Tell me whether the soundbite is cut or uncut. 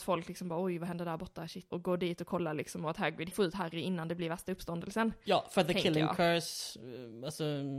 cut